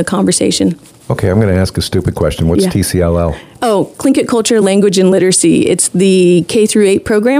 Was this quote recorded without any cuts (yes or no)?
yes